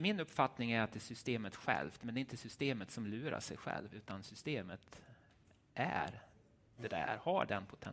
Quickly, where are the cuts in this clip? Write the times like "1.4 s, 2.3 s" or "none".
none